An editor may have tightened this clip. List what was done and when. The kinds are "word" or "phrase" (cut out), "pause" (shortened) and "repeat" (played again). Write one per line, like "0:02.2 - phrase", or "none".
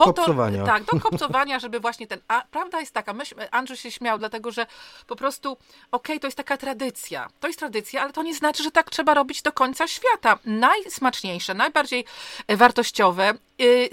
none